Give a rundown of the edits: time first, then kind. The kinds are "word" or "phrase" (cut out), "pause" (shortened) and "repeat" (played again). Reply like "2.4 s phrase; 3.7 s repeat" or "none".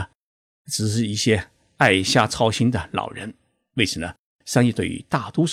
none